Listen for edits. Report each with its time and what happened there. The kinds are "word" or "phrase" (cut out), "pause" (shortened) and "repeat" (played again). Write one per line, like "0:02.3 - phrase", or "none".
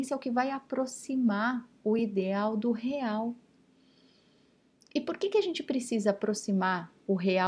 none